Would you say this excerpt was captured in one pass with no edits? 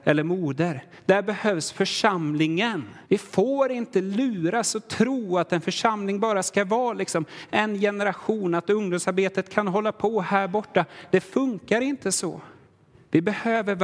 no; 1 cut; at 3.0 s

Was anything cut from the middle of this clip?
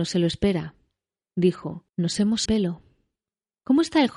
yes; 2 cuts; at 1.9 s, 2.5 s

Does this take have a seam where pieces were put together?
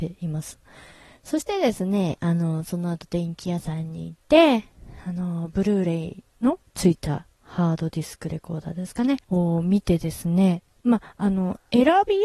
yes; 3 cuts; at 4.2 s, 6.7 s, 9.2 s

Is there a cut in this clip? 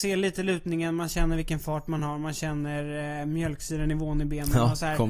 no; 0 cuts

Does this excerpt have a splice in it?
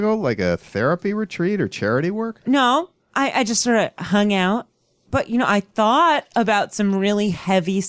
no; 0 cuts

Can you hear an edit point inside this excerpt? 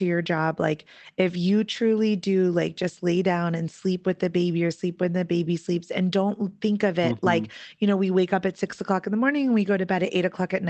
no; 0 cuts

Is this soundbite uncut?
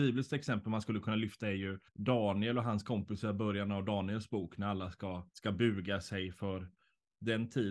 no; 2 cuts; at 1.9 s, 5.3 s

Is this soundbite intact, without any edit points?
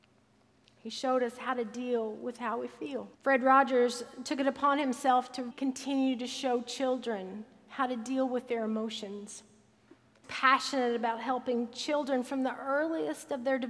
no; 3 cuts; at 3.1 s, 5.5 s, 10.2 s

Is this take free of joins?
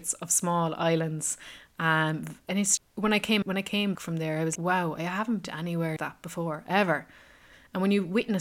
no; 6 cuts; at 2.8 s, 3.4 s, 4.0 s, 4.6 s, 5.4 s, 6.0 s

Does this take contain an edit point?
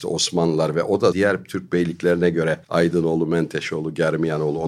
yes; 2 cuts; at 1.1 s, 2.6 s

